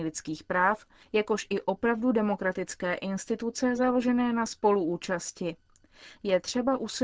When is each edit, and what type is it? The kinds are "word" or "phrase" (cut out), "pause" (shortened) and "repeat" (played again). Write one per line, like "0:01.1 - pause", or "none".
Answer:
none